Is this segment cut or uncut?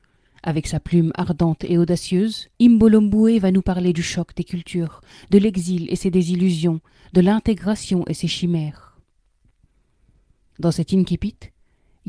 cut